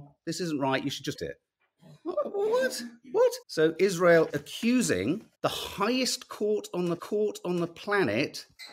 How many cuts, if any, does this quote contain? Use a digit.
5